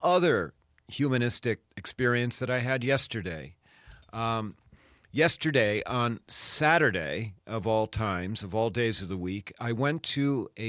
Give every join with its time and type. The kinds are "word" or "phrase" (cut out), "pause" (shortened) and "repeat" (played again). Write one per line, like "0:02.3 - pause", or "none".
0:01.7 - pause